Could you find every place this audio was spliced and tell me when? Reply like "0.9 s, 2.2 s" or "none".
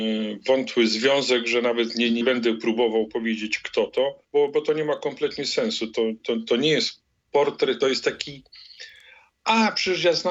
2.2 s, 4.2 s, 7.8 s